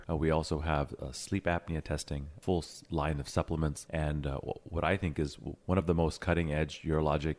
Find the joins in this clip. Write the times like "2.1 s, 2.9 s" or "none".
none